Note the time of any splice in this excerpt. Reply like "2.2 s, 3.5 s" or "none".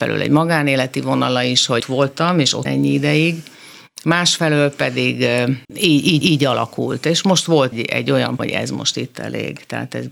1.8 s, 2.6 s, 5.6 s, 6.2 s, 7.7 s, 8.4 s